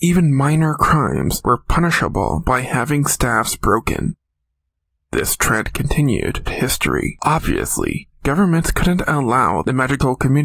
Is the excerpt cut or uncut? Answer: cut